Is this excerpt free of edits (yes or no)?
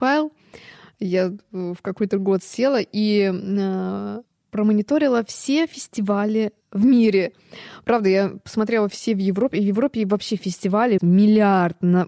no